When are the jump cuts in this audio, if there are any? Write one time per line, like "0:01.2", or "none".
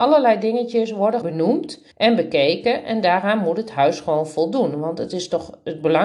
0:01.2
0:01.9